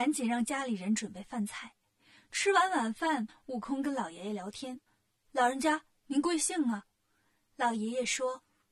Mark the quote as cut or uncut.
uncut